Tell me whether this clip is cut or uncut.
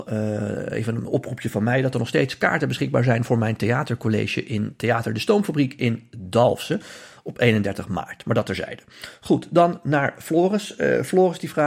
uncut